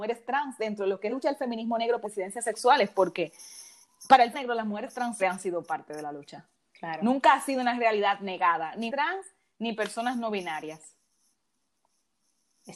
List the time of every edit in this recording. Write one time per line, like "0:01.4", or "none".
0:01.1
0:02.0
0:04.3
0:05.2
0:08.9